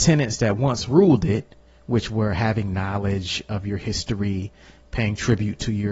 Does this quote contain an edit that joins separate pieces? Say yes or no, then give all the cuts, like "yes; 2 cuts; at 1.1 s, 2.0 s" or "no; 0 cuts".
no; 0 cuts